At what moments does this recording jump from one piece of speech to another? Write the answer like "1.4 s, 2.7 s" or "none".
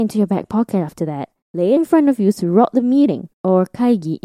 1.4 s, 1.8 s, 3.3 s